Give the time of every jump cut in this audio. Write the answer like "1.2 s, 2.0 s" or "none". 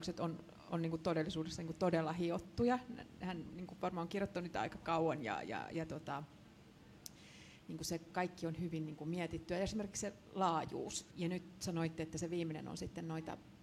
11.1 s